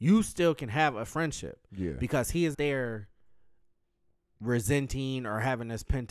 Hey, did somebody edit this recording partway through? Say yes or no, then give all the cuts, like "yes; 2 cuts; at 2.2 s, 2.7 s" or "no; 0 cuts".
yes; 1 cut; at 2.5 s